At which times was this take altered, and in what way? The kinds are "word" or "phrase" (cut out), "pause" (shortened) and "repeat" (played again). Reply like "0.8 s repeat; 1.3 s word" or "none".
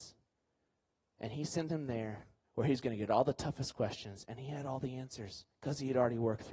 none